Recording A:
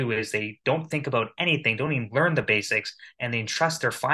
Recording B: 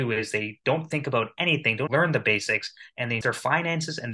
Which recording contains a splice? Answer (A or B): B